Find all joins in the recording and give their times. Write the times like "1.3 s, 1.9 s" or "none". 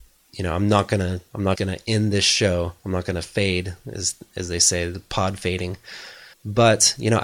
1.6 s, 6.3 s